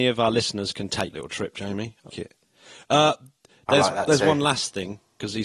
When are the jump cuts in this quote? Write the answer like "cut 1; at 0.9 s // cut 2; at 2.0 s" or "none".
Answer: cut 1; at 1.1 s // cut 2; at 2.1 s